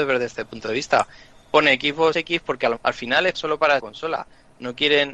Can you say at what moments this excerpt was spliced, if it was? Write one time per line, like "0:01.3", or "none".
0:02.1
0:02.8
0:03.3
0:03.8